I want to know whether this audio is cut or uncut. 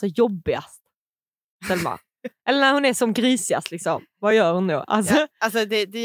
uncut